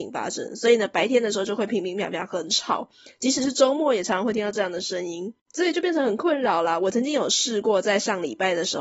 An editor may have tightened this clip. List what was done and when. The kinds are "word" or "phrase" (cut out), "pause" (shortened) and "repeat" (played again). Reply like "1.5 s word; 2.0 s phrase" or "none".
5.4 s pause